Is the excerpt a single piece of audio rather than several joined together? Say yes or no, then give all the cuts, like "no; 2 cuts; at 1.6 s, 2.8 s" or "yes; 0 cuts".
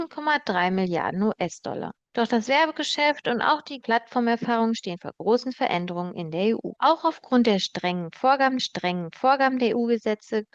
no; 3 cuts; at 3.8 s, 6.8 s, 8.6 s